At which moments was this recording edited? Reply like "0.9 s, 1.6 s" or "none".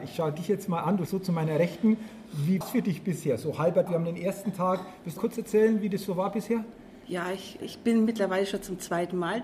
1.1 s, 2.6 s, 3.9 s, 5.2 s, 6.1 s, 7.6 s